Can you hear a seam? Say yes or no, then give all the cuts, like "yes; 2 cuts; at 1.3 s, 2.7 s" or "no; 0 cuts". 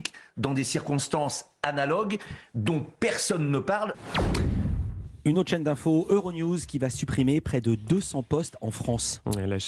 no; 0 cuts